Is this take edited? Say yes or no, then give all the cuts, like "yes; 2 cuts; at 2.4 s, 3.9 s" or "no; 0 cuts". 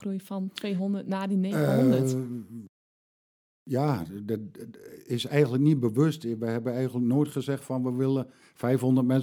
no; 0 cuts